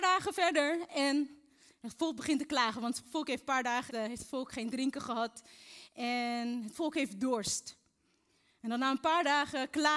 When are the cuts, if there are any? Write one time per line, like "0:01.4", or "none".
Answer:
0:03.9